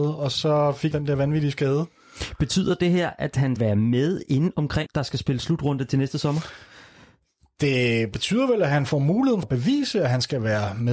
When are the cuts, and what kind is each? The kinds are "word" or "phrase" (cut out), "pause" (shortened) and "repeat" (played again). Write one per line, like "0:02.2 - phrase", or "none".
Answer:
0:00.9 - word
0:03.6 - word
0:04.9 - word
0:09.4 - word